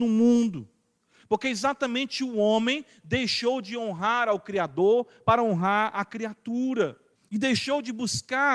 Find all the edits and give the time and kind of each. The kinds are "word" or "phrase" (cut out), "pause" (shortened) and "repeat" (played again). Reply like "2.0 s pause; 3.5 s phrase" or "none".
7.2 s pause